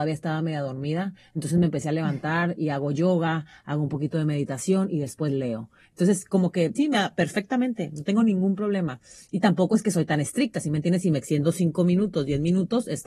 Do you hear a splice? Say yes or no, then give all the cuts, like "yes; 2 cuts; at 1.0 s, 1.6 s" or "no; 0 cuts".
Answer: yes; 1 cut; at 6.8 s